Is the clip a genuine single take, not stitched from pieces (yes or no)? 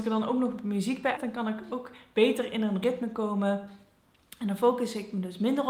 no